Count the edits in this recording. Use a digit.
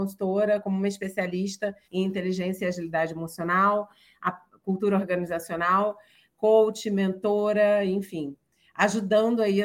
1